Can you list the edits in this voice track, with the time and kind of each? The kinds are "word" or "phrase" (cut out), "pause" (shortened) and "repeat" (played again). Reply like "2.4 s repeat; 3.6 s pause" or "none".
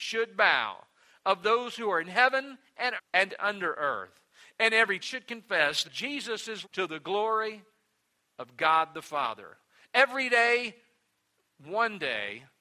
3.0 s word; 5.0 s word; 5.8 s word; 6.6 s word